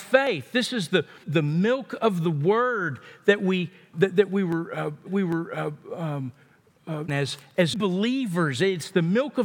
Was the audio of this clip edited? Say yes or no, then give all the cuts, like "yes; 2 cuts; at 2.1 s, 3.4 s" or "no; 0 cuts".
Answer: yes; 5 cuts; at 1.2 s, 3.9 s, 5.1 s, 7.1 s, 7.7 s